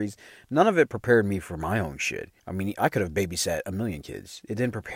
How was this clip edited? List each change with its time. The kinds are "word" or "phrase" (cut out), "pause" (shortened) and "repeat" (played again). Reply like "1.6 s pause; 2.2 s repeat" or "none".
2.4 s pause